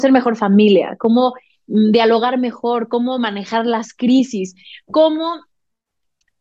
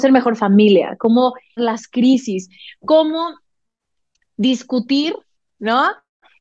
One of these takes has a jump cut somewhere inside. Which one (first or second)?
second